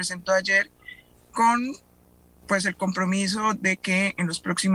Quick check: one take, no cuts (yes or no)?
yes